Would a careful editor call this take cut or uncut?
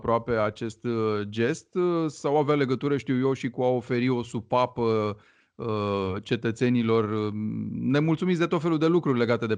uncut